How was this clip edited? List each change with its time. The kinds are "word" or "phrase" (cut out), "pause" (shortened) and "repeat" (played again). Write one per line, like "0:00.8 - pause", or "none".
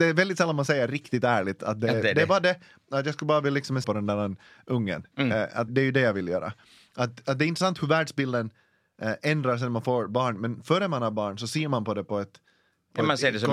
0:03.8 - word
0:05.7 - word